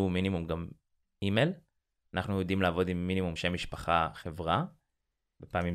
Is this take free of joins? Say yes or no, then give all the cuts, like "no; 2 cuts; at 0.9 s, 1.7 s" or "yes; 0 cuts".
no; 1 cut; at 3.4 s